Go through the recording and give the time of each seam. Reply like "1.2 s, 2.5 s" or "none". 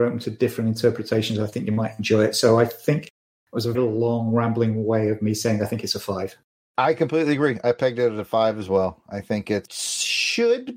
3.7 s

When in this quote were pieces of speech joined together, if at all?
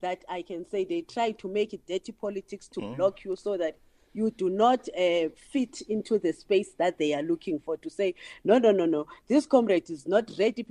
none

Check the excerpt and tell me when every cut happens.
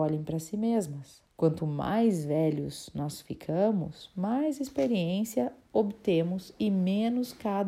1.3 s

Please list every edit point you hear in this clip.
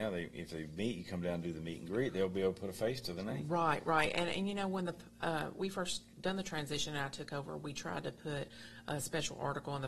none

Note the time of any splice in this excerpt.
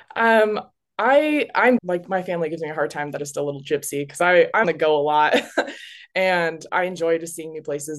1.8 s, 3.2 s, 4.6 s, 6.7 s

